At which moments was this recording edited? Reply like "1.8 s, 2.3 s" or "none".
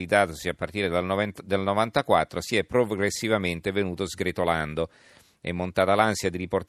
none